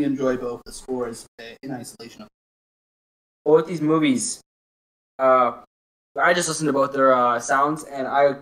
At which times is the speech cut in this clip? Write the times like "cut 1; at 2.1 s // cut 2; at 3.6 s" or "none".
none